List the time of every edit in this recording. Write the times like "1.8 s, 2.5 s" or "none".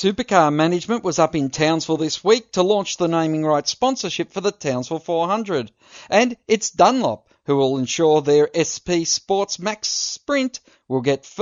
none

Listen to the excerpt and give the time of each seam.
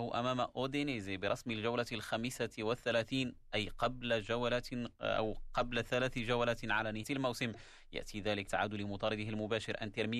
7.0 s, 8.5 s

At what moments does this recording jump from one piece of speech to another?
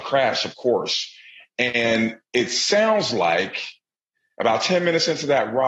none

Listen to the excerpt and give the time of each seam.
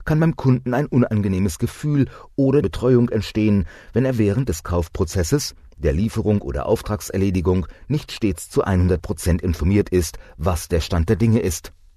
2.6 s

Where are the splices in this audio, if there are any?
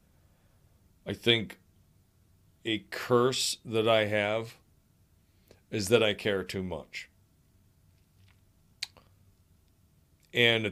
none

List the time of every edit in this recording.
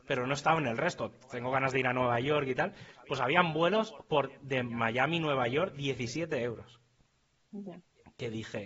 none

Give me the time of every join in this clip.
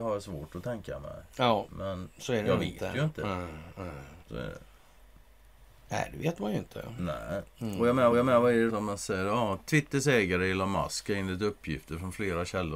4.2 s, 8.1 s, 8.7 s

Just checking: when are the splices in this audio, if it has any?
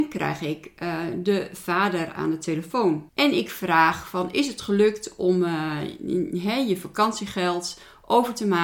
3.1 s

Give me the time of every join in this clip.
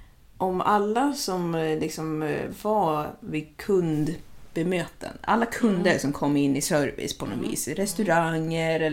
none

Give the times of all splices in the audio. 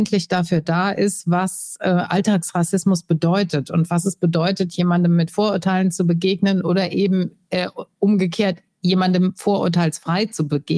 none

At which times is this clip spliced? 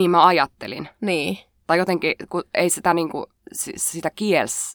1.5 s

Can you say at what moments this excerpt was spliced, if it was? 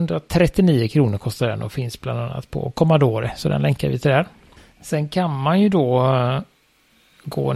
none

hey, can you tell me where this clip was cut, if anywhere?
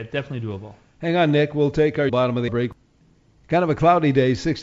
2.1 s, 2.5 s

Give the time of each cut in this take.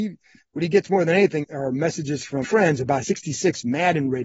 1.4 s, 2.4 s, 3.0 s

